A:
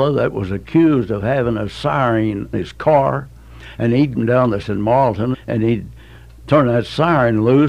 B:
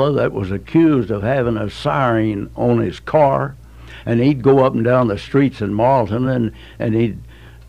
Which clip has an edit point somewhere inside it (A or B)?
A